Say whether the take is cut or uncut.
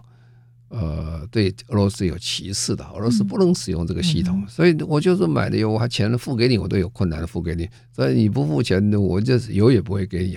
cut